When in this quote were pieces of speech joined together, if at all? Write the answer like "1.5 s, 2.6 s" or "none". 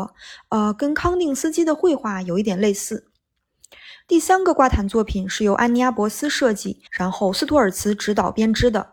6.9 s